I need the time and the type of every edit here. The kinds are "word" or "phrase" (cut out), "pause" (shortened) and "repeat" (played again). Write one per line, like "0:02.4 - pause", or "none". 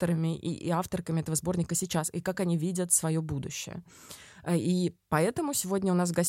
none